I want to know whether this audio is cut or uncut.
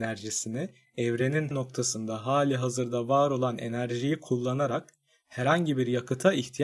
cut